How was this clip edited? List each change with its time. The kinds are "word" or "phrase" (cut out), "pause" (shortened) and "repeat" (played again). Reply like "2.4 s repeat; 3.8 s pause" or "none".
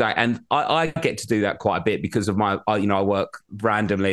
none